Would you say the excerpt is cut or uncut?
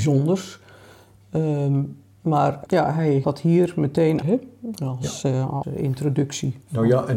cut